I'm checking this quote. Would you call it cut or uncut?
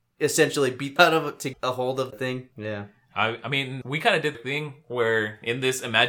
cut